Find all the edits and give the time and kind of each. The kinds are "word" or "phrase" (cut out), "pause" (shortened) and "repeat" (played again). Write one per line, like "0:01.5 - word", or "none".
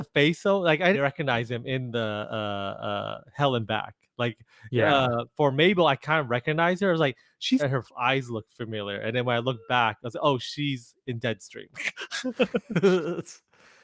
0:00.9 - word
0:07.6 - phrase